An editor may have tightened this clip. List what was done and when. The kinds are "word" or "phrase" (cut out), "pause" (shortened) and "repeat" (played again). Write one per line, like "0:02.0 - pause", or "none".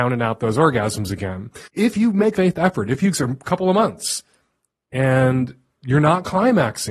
0:01.7 - pause
0:02.3 - phrase
0:03.1 - phrase